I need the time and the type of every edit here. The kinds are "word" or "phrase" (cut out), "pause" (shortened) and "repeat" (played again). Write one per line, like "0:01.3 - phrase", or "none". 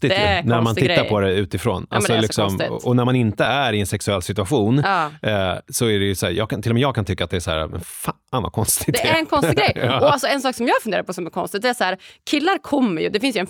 none